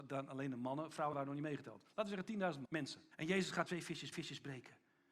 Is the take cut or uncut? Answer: cut